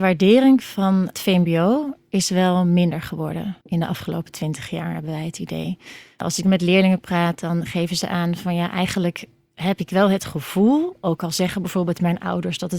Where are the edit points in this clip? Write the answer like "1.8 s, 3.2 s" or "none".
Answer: 3.6 s